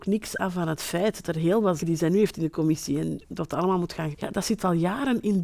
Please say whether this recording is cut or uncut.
cut